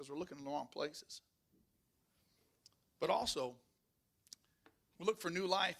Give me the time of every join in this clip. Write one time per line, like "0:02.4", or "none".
none